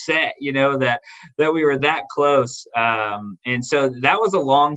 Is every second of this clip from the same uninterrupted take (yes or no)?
yes